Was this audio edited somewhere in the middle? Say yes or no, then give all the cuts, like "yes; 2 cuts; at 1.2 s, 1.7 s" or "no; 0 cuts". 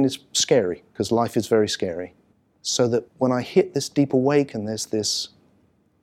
yes; 2 cuts; at 2.3 s, 3.1 s